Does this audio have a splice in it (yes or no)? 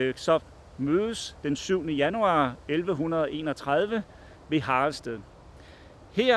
no